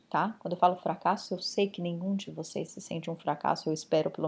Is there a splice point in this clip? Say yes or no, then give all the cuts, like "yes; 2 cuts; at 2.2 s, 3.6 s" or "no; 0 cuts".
no; 0 cuts